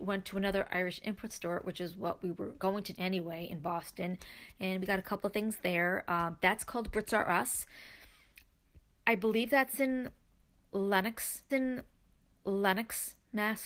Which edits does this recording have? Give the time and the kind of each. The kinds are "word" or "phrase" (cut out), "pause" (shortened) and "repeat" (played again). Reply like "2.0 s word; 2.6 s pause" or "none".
2.9 s word; 11.5 s repeat